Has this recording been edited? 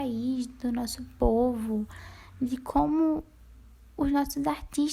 no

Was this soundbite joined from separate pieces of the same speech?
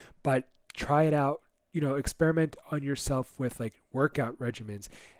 no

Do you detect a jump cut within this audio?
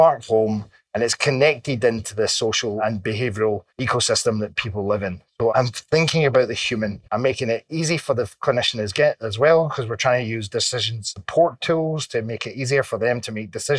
yes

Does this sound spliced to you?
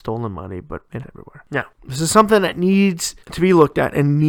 yes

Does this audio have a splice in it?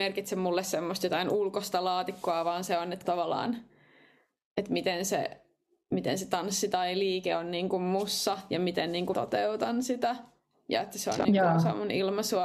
yes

